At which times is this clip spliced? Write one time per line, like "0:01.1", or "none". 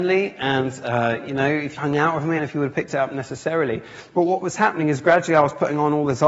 0:01.8
0:02.4